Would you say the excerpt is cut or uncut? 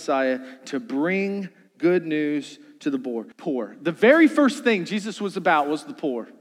cut